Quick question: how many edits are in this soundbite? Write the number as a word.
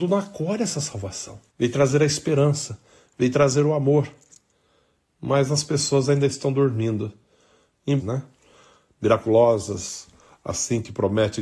two